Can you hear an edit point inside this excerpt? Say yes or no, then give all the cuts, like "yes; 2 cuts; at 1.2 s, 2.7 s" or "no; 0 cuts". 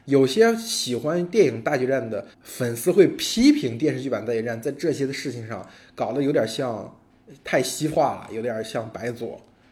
yes; 1 cut; at 2.3 s